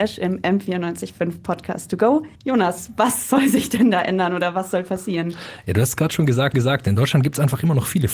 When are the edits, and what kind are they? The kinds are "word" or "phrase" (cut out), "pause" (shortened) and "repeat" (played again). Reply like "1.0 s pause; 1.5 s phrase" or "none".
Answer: 2.4 s pause; 6.5 s repeat